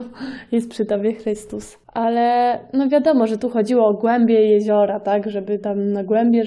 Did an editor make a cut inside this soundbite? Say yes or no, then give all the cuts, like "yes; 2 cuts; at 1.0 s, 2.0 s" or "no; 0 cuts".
yes; 1 cut; at 1.8 s